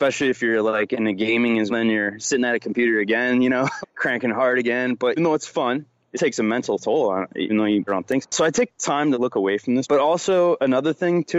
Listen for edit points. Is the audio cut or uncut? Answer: cut